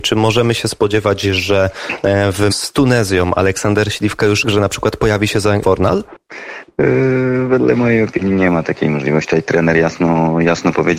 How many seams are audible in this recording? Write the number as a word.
three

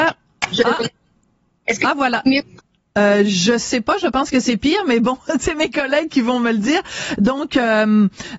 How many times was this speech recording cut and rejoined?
one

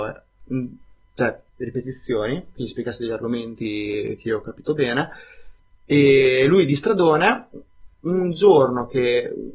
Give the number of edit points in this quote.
two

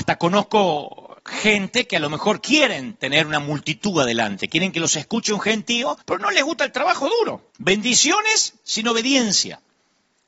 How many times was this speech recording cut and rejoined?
three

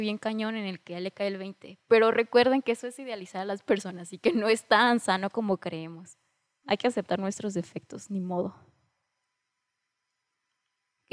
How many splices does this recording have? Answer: zero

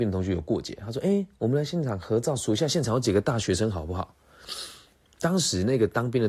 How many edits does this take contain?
zero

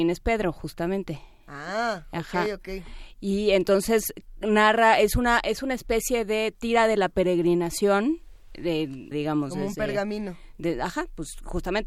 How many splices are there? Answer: one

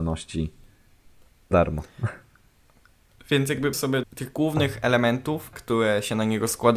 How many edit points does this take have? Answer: four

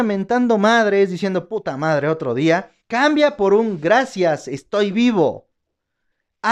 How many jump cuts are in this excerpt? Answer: one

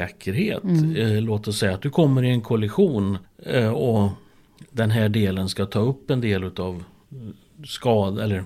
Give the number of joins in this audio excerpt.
one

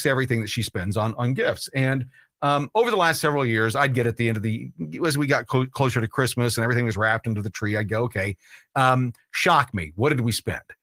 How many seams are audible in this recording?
zero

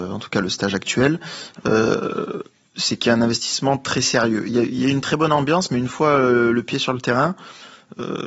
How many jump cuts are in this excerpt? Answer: zero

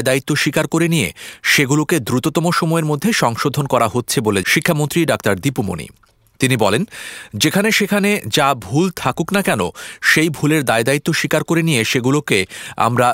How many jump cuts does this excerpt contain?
one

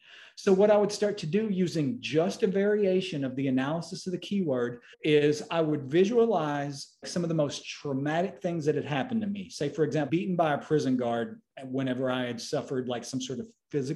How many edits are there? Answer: three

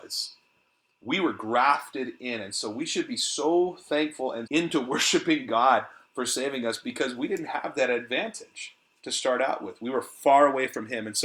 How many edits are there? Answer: one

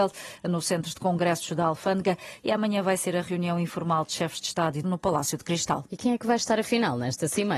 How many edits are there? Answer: one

